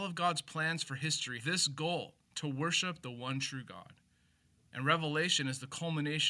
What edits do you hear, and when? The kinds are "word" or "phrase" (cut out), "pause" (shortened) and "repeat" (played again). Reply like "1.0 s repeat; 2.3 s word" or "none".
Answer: 1.4 s word; 2.2 s pause